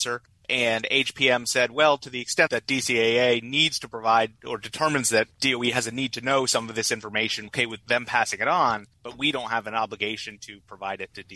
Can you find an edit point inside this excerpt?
yes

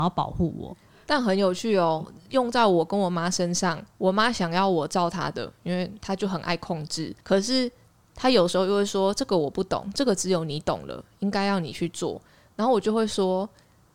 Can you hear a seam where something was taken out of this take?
yes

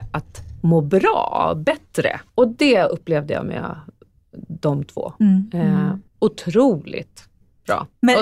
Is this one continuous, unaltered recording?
no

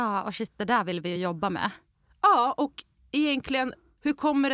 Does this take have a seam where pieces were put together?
no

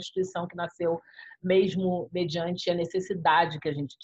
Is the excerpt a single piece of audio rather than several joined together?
yes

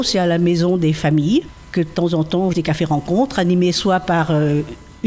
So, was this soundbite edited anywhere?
yes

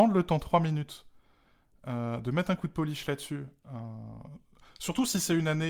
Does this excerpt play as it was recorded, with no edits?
yes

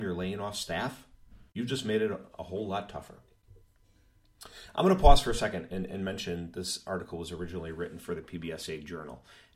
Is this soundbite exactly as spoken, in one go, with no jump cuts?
no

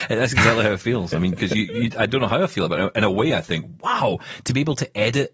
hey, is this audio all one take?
yes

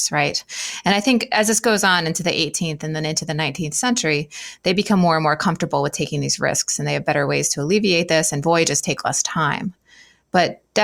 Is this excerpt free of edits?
yes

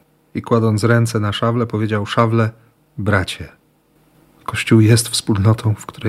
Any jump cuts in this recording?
no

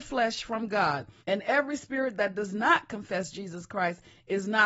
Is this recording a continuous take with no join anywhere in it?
no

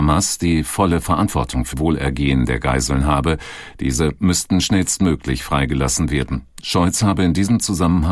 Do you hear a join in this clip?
yes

